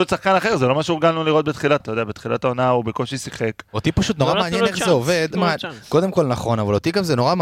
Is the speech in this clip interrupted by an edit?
yes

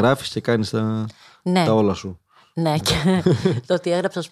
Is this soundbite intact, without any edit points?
yes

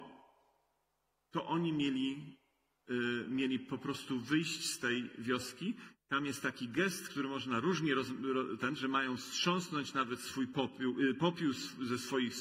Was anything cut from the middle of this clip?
no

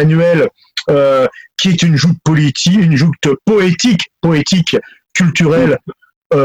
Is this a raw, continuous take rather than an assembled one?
yes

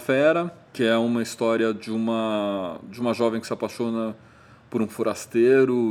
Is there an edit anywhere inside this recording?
no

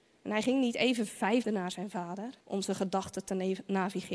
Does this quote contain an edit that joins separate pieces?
yes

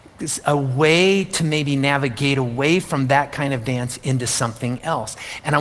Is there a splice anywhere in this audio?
no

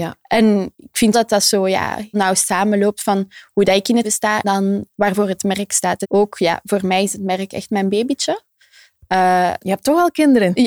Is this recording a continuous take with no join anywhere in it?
no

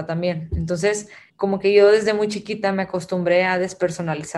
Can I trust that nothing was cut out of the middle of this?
yes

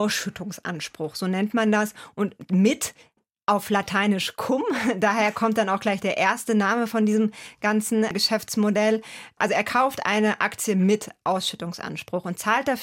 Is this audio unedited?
yes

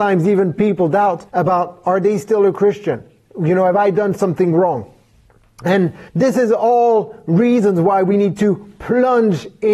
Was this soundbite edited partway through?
yes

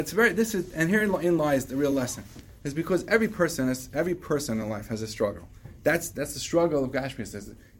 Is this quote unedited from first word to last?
yes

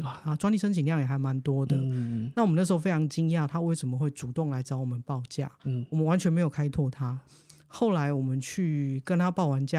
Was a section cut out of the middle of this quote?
no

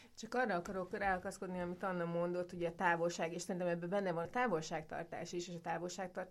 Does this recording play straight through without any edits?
no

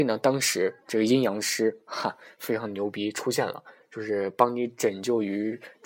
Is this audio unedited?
yes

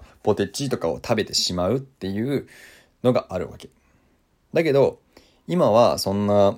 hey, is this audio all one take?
yes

